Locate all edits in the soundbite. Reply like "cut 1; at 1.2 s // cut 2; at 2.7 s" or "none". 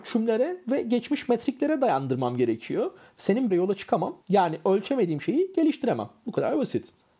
cut 1; at 3.5 s // cut 2; at 4.2 s